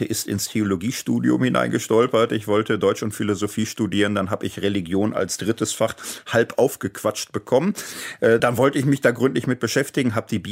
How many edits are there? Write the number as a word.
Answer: one